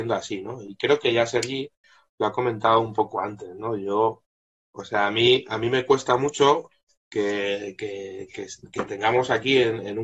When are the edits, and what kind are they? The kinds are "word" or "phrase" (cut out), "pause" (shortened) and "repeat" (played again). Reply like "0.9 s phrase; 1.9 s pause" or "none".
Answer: none

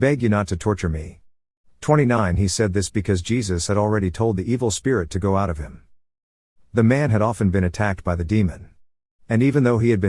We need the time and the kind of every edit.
none

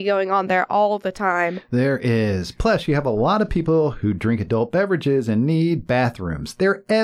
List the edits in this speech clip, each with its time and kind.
none

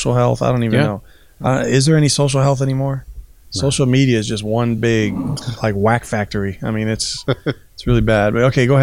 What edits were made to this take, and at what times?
none

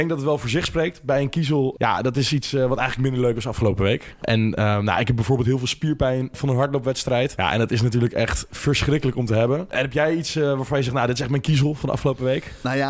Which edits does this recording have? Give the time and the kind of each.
none

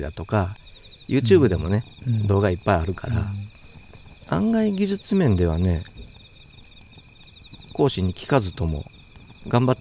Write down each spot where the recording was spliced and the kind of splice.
4.2 s pause

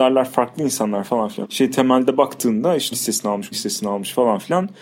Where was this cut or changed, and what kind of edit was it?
1.4 s word; 2.9 s word; 3.5 s word

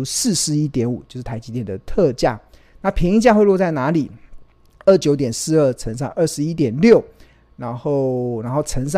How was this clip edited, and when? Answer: none

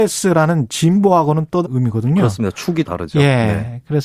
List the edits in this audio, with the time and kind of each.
1.6 s word; 2.8 s word

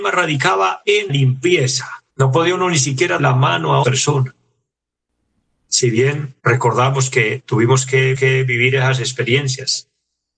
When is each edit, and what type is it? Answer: 1.1 s word; 2.1 s pause; 3.2 s word; 3.8 s word; 6.4 s pause; 8.1 s repeat

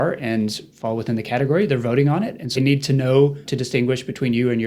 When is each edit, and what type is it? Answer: 2.6 s word; 3.5 s word

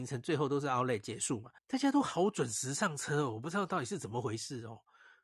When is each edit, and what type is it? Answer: 1.6 s pause

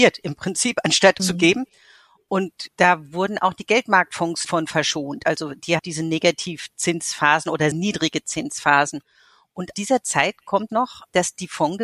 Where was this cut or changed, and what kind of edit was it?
1.2 s phrase; 4.5 s word; 5.8 s phrase; 7.7 s word; 9.7 s word; 10.7 s word

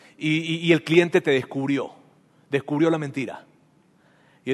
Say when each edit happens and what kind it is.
none

